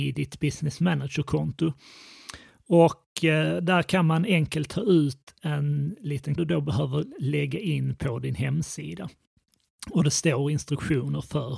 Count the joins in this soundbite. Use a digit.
1